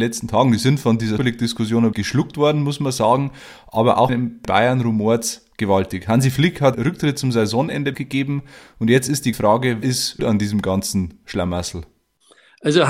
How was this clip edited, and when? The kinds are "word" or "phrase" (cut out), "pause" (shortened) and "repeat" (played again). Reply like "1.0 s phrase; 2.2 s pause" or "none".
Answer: 1.2 s word; 1.9 s word; 4.1 s word; 4.4 s word; 6.7 s word; 7.9 s word; 9.3 s word; 9.8 s word; 10.2 s word